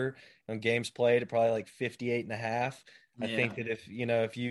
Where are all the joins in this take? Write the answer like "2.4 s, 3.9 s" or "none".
none